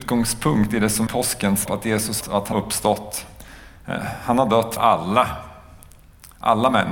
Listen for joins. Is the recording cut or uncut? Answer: cut